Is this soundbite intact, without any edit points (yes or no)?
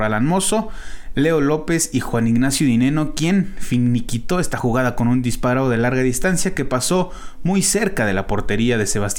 yes